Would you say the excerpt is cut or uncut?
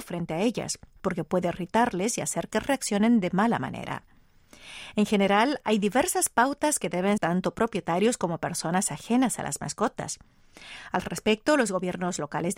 cut